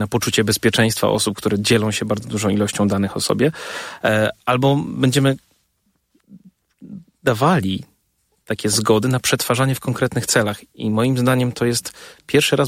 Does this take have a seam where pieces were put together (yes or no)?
no